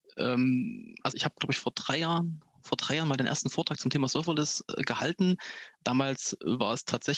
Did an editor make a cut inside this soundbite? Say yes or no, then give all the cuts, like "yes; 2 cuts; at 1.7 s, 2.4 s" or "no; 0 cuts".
yes; 1 cut; at 1.1 s